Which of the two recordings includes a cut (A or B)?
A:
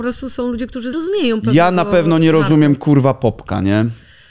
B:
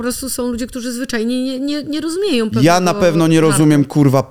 A